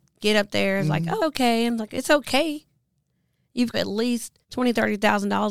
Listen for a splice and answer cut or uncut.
cut